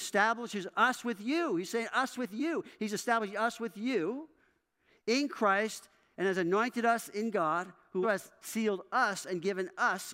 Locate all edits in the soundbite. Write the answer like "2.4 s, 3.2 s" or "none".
8.0 s